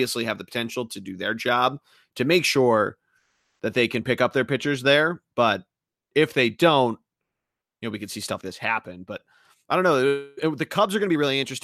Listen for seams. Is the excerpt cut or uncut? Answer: cut